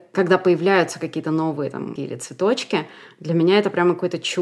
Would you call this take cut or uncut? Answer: cut